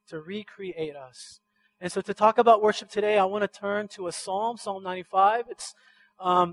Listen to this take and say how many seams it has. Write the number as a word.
zero